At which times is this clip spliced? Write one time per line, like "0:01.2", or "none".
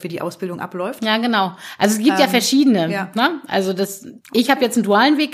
0:04.2

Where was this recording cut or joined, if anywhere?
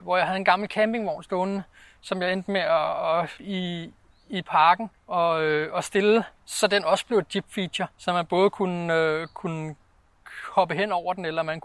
0:03.4
0:05.0
0:06.4
0:07.9

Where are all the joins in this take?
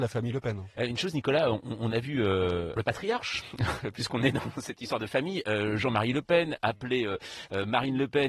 0:02.8

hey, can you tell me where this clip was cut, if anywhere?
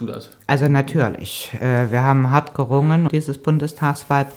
0:03.1

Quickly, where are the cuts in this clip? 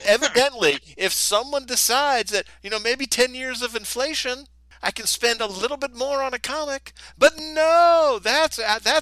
none

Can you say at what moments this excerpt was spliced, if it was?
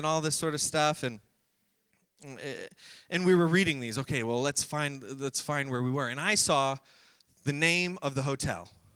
none

